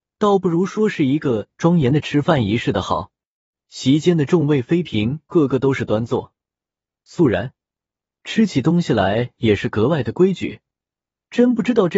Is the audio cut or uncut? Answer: uncut